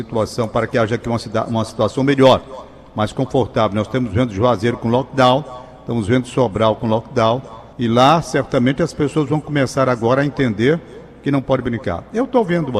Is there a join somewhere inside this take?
yes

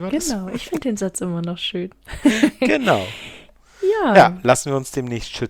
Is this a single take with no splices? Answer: yes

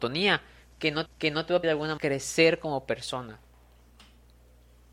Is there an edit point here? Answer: yes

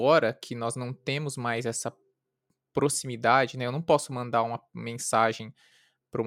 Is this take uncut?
yes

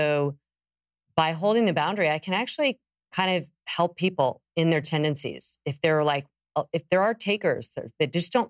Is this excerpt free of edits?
yes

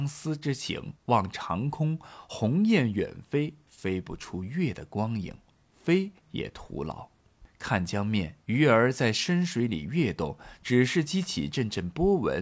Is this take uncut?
no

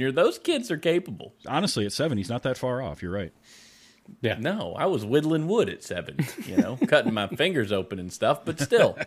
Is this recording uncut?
yes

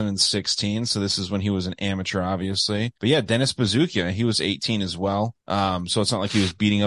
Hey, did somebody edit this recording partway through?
yes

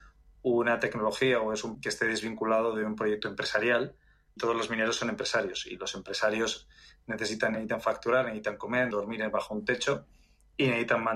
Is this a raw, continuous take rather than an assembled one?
no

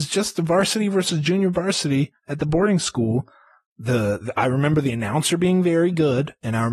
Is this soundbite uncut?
yes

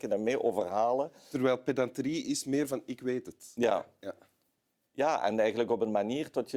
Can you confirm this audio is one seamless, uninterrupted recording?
yes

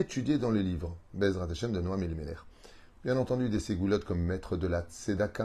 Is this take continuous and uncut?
yes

